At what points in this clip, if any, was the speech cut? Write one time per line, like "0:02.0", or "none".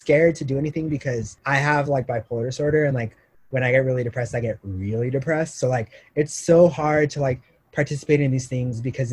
none